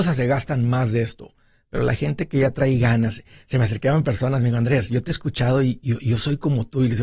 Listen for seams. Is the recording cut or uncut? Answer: uncut